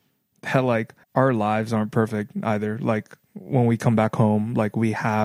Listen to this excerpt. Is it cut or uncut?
cut